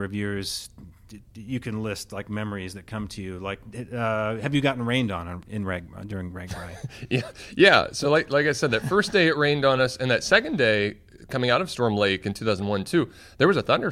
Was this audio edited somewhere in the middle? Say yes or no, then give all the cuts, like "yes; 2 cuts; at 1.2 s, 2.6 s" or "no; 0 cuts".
no; 0 cuts